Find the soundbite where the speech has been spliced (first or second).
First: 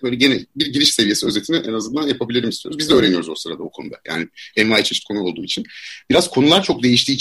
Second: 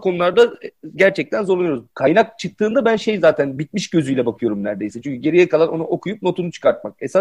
second